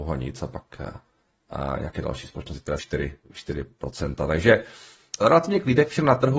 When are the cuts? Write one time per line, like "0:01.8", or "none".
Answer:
0:02.8
0:03.2
0:05.2